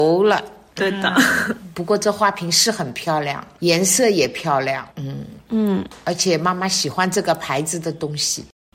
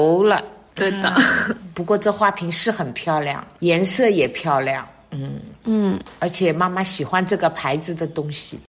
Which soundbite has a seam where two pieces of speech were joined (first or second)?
first